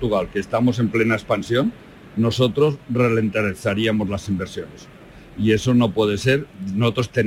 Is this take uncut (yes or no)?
yes